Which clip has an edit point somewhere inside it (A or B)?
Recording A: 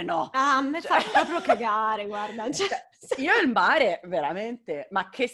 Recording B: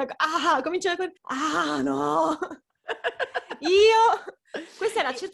B